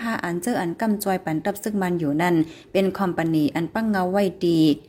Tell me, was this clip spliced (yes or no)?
no